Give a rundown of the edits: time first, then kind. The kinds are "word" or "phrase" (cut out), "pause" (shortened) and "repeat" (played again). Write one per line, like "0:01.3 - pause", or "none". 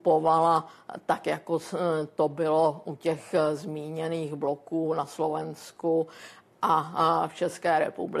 none